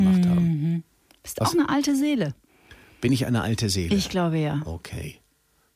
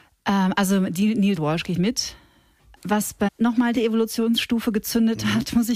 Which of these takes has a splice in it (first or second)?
second